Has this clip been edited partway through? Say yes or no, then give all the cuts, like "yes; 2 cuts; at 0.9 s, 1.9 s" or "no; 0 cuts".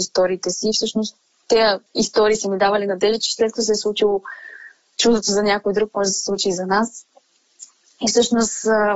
yes; 1 cut; at 1.9 s